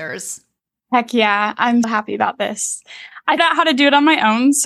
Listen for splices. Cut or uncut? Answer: cut